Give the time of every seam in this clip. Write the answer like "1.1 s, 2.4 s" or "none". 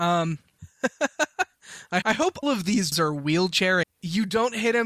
2.0 s, 2.4 s, 2.9 s, 3.8 s